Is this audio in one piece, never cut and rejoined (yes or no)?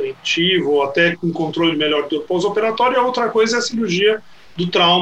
yes